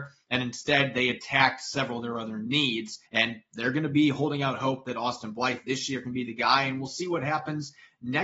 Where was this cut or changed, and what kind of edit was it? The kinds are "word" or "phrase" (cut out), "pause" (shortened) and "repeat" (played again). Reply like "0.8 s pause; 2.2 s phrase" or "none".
3.1 s pause